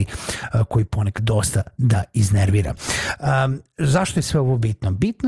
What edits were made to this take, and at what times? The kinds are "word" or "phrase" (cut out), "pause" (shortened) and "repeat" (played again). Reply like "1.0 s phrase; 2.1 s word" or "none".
1.2 s word